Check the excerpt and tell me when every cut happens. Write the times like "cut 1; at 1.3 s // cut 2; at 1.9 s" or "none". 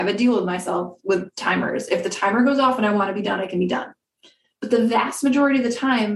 none